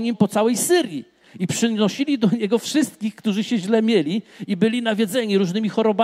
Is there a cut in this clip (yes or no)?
no